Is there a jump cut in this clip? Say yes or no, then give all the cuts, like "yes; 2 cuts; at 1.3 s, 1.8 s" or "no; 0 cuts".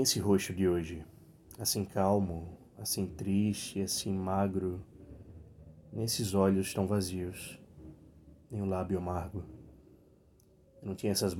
yes; 1 cut; at 2.7 s